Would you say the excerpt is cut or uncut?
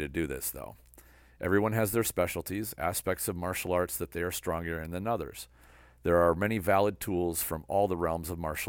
uncut